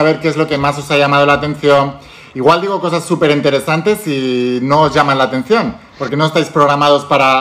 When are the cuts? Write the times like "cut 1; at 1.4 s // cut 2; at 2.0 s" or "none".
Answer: none